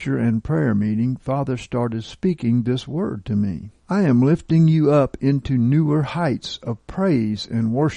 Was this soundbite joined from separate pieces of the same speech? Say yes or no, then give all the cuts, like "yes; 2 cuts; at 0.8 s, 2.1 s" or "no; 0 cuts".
yes; 1 cut; at 3.8 s